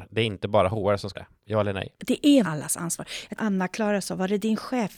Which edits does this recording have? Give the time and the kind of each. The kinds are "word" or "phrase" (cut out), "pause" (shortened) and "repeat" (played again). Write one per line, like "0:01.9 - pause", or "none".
0:01.1 - word
0:01.9 - pause
0:02.4 - word
0:03.4 - phrase